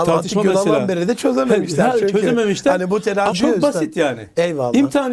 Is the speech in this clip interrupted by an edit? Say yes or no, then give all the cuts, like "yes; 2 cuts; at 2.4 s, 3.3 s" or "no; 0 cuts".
yes; 1 cut; at 3.3 s